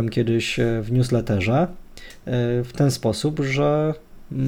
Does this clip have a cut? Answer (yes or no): no